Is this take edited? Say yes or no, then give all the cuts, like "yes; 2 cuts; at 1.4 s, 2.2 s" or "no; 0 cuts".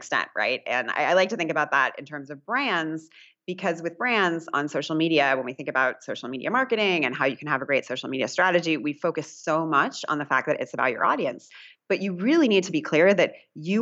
no; 0 cuts